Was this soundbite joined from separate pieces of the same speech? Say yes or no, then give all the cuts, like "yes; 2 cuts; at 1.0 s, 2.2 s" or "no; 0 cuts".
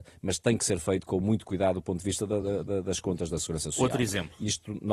no; 0 cuts